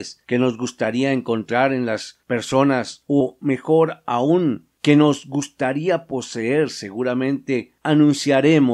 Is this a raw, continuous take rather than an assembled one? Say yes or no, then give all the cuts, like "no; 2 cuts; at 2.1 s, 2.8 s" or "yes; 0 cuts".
yes; 0 cuts